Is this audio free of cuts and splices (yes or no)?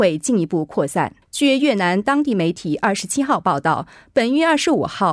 no